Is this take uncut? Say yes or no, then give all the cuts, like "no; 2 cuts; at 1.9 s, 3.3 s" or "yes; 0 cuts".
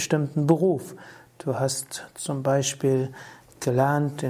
yes; 0 cuts